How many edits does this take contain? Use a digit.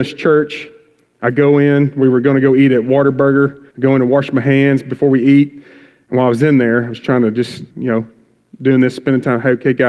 2